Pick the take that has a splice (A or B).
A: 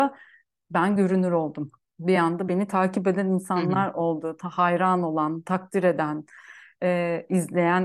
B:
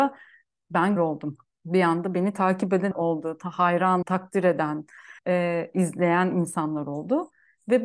B